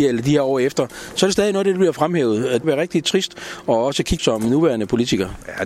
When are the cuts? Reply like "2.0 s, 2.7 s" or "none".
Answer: 2.6 s, 4.2 s